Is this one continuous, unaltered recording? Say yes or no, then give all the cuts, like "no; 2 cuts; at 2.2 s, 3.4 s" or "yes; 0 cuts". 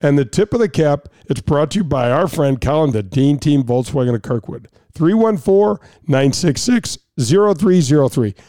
no; 1 cut; at 2.9 s